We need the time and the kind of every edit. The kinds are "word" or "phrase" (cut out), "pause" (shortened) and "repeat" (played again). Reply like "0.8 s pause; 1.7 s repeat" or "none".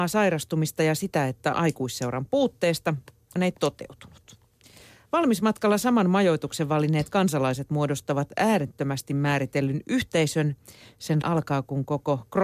1.5 s word; 3.4 s word; 11.2 s word